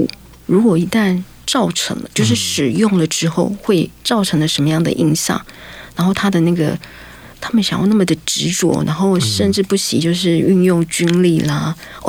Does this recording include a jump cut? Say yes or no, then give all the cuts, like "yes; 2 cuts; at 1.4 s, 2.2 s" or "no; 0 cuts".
yes; 1 cut; at 4.0 s